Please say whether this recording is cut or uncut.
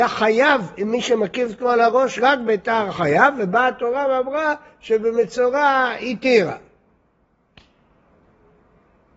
uncut